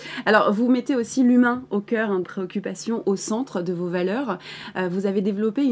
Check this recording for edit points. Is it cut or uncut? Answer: cut